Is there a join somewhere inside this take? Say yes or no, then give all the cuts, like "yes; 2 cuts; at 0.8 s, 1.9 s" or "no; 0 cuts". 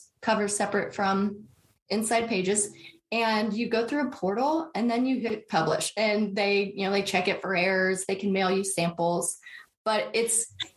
no; 0 cuts